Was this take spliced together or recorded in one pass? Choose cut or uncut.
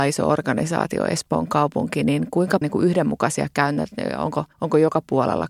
cut